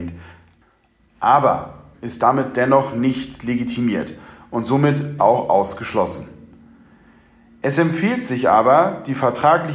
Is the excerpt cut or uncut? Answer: cut